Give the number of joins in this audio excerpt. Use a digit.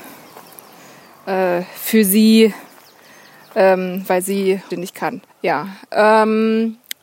2